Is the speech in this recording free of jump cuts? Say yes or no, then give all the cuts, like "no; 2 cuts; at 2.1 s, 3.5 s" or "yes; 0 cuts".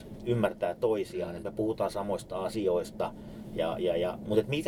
yes; 0 cuts